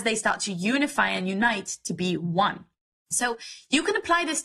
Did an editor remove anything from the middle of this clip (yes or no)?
no